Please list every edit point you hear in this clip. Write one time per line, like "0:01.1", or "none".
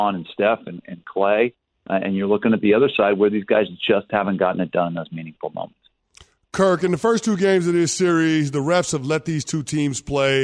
none